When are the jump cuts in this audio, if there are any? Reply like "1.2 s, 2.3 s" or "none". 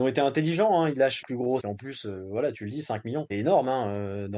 1.2 s, 1.6 s, 3.3 s